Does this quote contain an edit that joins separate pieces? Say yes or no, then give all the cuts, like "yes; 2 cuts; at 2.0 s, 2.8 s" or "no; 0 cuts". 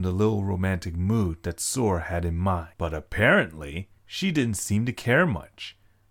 yes; 2 cuts; at 2.7 s, 4.0 s